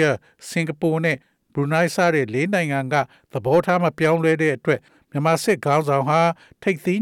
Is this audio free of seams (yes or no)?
yes